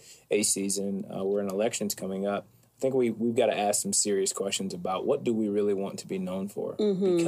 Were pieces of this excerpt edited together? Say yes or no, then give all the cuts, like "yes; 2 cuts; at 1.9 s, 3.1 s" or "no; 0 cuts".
no; 0 cuts